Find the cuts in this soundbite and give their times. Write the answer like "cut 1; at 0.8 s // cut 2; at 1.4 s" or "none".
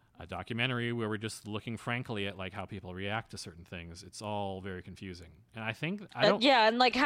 none